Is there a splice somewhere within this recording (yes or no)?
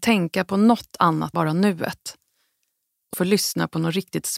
yes